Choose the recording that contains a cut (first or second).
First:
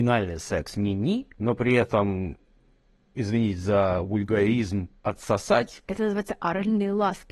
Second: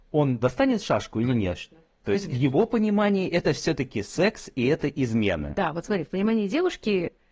first